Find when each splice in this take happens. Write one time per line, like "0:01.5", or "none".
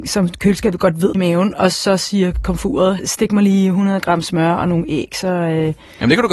0:01.1
0:03.0